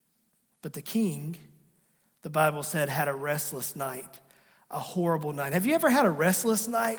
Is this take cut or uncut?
uncut